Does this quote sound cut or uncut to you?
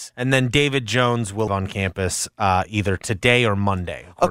cut